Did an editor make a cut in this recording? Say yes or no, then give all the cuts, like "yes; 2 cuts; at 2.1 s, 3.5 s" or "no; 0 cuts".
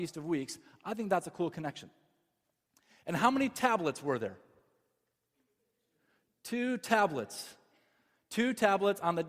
no; 0 cuts